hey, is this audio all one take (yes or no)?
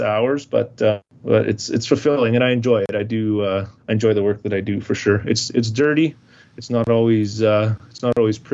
no